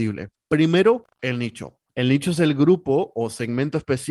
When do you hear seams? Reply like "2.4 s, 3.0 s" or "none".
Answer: none